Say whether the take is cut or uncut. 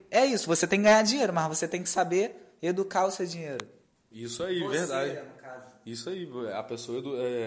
uncut